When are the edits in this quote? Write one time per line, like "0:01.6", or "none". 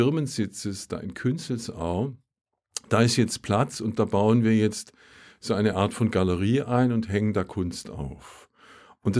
none